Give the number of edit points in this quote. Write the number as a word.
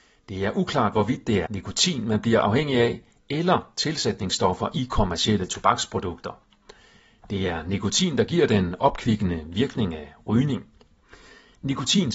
one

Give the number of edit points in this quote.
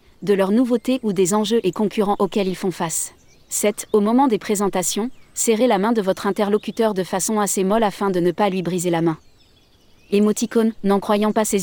one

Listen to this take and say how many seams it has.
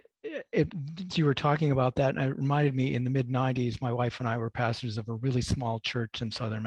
one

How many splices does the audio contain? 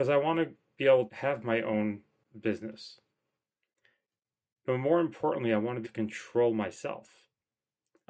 two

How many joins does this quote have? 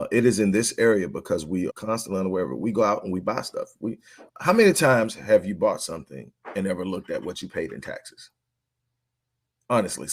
two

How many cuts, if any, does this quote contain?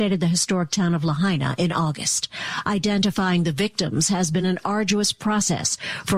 zero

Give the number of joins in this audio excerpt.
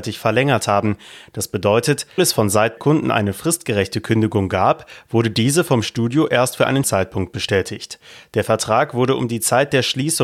three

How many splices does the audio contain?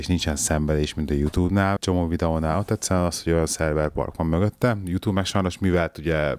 one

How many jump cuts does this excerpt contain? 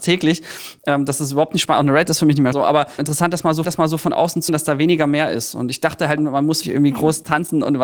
six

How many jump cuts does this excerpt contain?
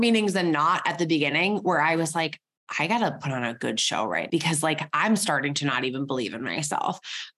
one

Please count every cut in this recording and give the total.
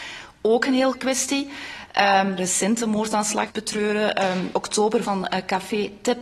five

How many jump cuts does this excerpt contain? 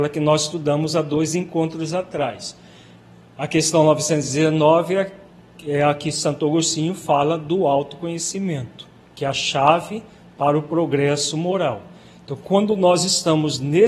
zero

